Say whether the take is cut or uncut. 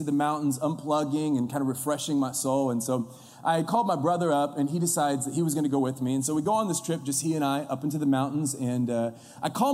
uncut